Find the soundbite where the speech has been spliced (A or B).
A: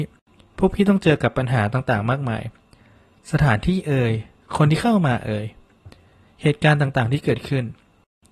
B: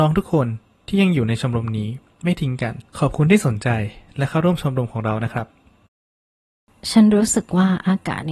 B